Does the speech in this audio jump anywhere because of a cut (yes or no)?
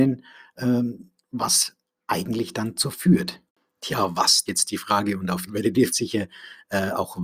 yes